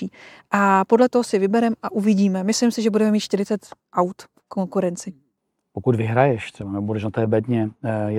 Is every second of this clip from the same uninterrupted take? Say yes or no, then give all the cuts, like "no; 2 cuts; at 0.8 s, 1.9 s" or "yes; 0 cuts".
yes; 0 cuts